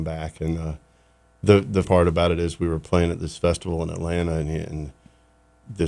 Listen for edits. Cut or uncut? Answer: cut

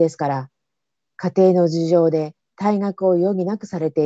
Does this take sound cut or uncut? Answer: cut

